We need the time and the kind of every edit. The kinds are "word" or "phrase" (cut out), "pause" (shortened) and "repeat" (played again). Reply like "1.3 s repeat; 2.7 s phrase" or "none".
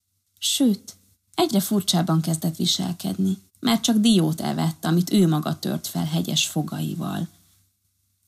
1.1 s pause; 3.5 s pause